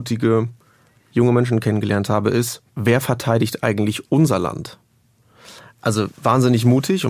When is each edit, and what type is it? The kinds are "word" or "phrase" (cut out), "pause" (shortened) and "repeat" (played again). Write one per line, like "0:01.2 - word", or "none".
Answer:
0:02.7 - pause
0:06.1 - pause